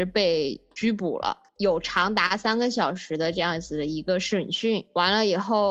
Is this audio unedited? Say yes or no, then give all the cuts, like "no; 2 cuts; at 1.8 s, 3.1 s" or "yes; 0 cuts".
no; 1 cut; at 1.5 s